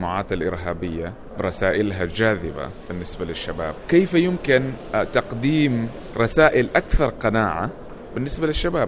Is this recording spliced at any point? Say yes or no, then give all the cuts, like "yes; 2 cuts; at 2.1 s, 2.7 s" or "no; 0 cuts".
no; 0 cuts